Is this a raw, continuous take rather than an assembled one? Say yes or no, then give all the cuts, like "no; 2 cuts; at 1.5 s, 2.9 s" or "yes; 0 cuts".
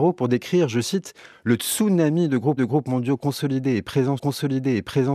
no; 2 cuts; at 2.6 s, 4.2 s